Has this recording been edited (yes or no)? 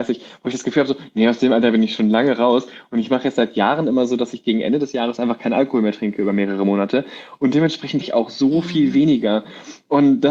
yes